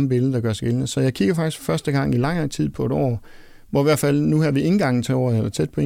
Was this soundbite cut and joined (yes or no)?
no